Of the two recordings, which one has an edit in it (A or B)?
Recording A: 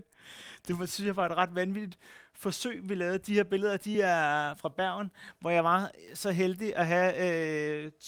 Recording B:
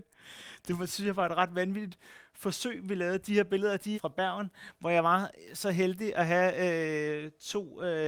B